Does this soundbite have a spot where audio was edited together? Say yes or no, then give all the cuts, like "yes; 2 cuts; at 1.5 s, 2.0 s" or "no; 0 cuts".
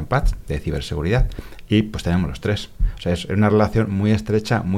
no; 0 cuts